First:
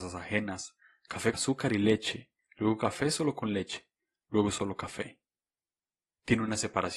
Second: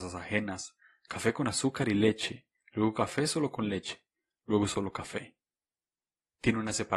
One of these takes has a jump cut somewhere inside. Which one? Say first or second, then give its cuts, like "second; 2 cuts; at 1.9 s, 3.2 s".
first; 1 cut; at 1.3 s